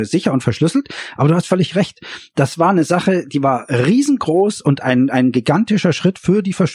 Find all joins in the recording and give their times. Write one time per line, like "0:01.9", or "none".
0:04.8